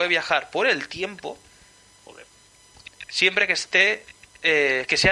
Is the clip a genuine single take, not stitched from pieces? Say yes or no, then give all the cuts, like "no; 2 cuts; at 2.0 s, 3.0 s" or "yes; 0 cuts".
yes; 0 cuts